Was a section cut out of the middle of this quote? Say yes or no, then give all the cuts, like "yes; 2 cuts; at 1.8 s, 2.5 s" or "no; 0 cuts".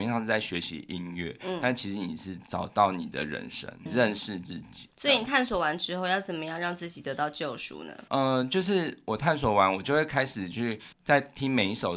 yes; 3 cuts; at 3.9 s, 8.1 s, 10.9 s